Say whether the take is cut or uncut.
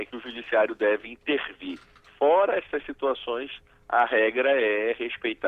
uncut